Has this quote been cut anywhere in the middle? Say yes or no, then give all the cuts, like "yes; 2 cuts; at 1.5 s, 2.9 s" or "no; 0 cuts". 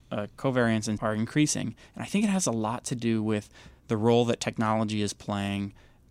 yes; 1 cut; at 1.0 s